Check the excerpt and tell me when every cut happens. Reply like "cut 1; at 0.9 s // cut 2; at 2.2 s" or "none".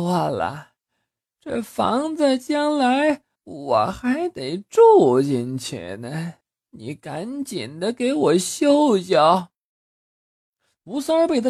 cut 1; at 3.4 s // cut 2; at 6.4 s